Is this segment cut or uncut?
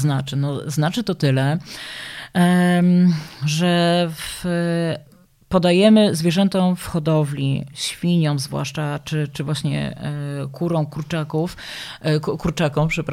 uncut